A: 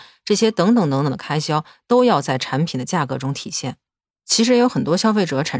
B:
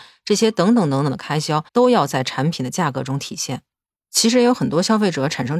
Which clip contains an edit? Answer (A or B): B